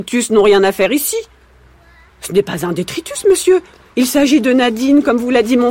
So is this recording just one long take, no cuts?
yes; 0 cuts

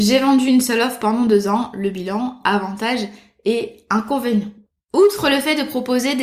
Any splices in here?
no; 0 cuts

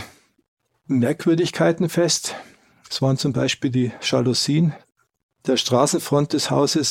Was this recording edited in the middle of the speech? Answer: no; 0 cuts

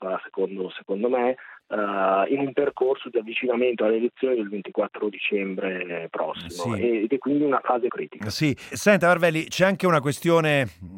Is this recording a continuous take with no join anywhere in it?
no; 2 cuts; at 7.9 s, 8.7 s

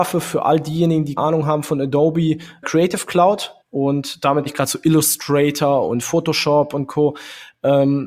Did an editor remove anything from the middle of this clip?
yes; 4 cuts; at 1.2 s, 2.6 s, 3.6 s, 4.5 s

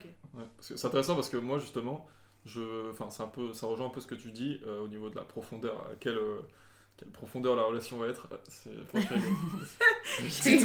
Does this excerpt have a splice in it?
no; 0 cuts

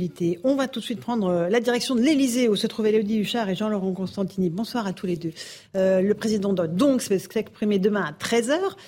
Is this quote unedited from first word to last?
yes; 0 cuts

